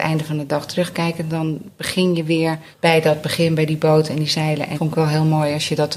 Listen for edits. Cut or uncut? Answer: cut